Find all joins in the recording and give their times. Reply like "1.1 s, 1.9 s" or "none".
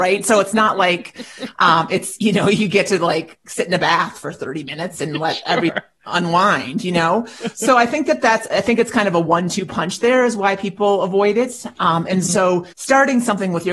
12.7 s